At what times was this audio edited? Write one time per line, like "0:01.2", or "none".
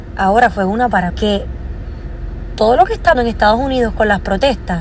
0:01.1
0:02.6
0:03.1